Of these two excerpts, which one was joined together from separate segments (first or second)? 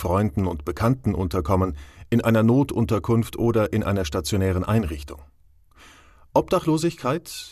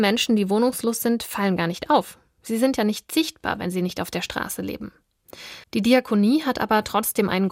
second